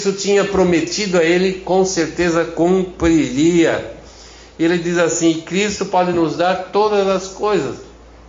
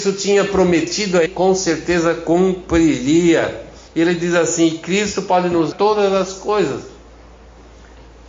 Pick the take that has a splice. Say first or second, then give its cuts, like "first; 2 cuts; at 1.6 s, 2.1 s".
second; 3 cuts; at 1.3 s, 3.9 s, 5.7 s